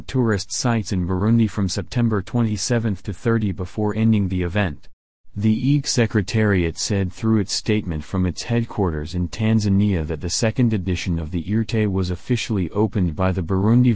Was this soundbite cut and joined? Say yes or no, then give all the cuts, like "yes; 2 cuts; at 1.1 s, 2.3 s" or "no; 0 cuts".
no; 0 cuts